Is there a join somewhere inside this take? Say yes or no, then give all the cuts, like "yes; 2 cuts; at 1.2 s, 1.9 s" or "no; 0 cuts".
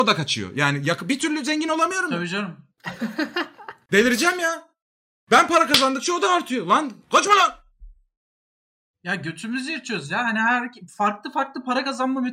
no; 0 cuts